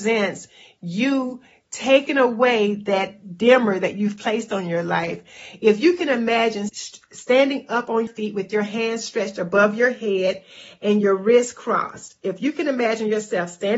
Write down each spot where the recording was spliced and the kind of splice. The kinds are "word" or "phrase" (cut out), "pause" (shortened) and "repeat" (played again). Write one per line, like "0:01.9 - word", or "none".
0:06.7 - word
0:08.1 - word